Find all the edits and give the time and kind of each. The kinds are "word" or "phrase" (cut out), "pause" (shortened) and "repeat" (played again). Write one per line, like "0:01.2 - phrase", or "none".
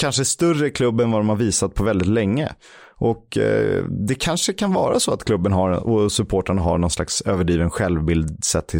none